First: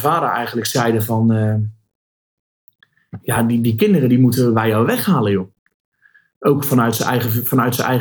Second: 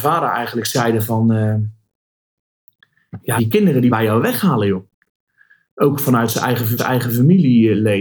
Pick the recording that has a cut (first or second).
second